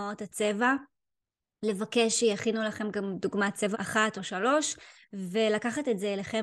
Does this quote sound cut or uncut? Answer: cut